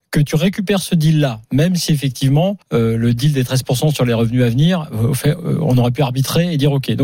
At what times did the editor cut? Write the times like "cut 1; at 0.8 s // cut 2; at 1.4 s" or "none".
cut 1; at 2.6 s